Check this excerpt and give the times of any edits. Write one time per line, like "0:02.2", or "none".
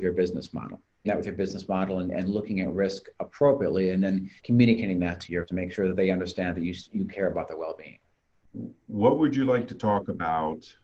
0:01.0
0:04.4
0:05.5